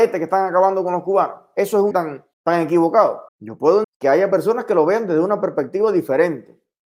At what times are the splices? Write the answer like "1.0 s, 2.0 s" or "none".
1.9 s, 2.3 s, 3.3 s, 3.8 s